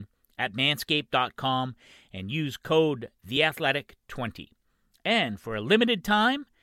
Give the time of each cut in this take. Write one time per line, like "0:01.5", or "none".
none